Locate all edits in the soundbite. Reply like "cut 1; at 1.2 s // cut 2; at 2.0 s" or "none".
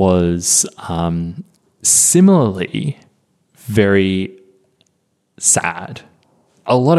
none